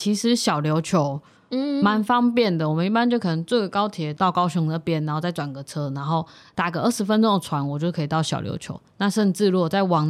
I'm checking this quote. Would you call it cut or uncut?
uncut